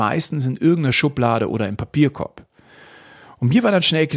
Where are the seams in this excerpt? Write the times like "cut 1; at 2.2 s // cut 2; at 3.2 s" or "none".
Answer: none